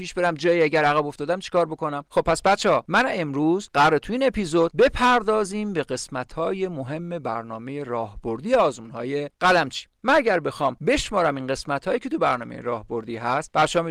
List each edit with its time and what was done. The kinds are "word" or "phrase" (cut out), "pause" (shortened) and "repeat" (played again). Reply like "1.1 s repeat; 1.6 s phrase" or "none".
9.9 s pause

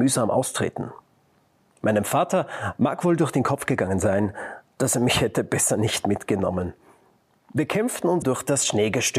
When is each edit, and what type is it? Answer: 8.2 s word

